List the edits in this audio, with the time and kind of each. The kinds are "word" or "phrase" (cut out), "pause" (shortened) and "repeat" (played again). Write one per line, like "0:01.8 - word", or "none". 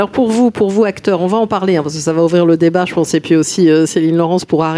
none